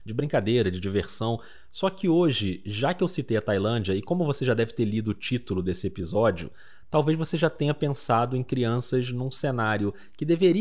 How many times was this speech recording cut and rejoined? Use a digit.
0